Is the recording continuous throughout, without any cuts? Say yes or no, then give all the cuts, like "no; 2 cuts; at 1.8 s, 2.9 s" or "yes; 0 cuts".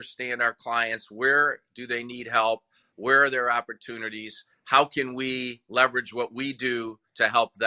yes; 0 cuts